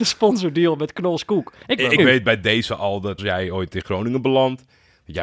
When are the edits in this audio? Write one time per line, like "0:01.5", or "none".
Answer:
0:02.0
0:03.2